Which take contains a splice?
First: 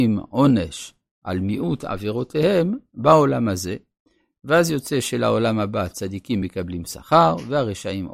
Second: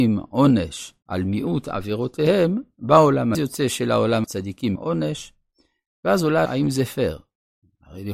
second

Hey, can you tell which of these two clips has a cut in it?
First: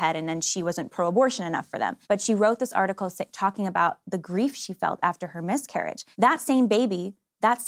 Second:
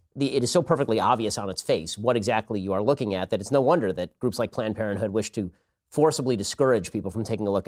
first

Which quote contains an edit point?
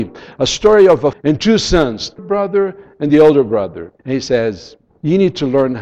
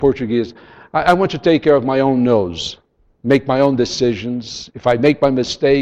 first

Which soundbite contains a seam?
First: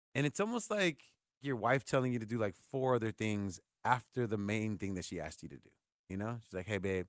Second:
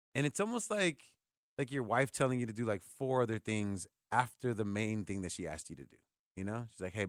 first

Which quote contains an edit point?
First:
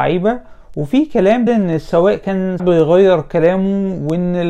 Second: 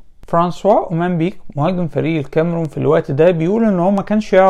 first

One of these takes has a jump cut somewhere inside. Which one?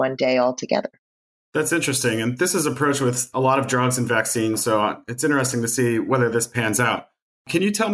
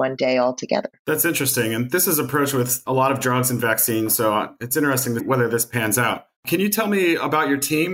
second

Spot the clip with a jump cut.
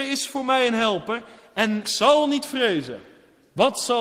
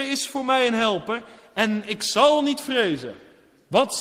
first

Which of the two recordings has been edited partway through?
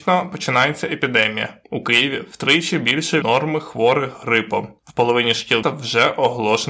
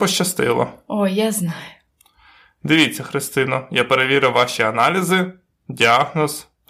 first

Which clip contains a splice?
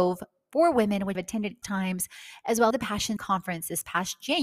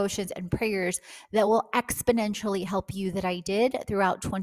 first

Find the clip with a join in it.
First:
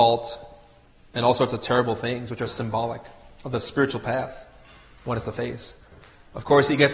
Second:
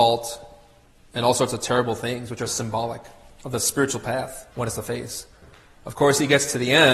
second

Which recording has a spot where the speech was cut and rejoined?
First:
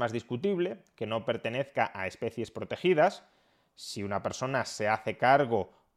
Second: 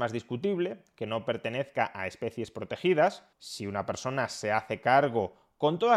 second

